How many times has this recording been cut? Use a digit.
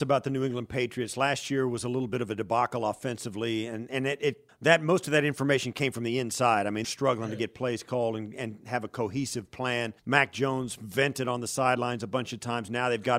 3